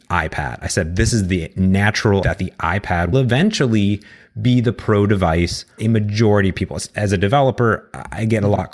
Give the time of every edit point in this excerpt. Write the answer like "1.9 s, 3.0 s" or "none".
2.2 s, 3.1 s, 5.8 s